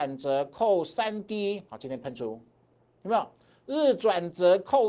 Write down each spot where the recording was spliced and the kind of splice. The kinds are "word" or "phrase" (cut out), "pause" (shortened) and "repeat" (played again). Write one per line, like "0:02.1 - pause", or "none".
none